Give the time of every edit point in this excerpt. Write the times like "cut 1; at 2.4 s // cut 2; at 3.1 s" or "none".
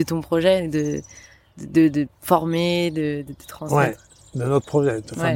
none